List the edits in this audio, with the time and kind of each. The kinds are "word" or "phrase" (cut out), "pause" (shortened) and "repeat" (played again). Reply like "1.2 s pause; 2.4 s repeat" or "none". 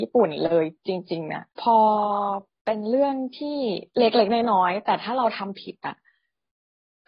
1.5 s pause